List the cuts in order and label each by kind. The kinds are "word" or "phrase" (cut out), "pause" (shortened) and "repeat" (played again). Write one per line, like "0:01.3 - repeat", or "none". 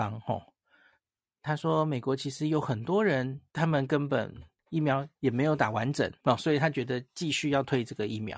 0:03.5 - pause
0:05.1 - pause
0:06.2 - pause